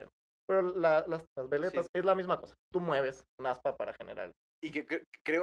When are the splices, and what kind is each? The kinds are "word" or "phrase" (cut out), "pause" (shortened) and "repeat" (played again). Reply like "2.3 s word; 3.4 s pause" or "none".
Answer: 1.3 s phrase; 1.9 s phrase

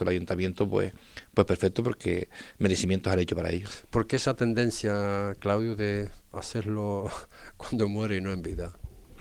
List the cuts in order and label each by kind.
6.2 s pause

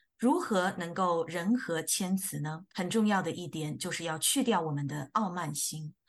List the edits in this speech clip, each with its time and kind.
2.7 s pause

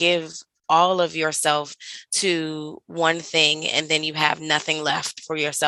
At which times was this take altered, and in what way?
none

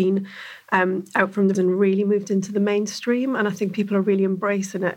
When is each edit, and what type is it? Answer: 1.5 s word

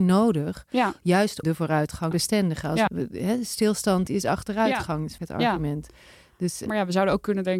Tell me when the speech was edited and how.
1.4 s word; 2.1 s word; 2.9 s word; 4.1 s word; 5.2 s word; 6.7 s word

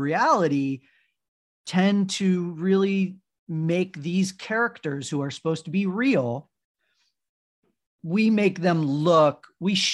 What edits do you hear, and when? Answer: none

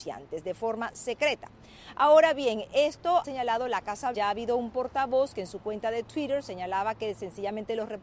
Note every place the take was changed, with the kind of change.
3.2 s word; 4.1 s word

